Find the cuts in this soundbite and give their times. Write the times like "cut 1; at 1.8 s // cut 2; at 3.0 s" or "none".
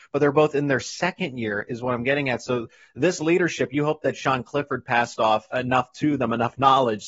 cut 1; at 5.5 s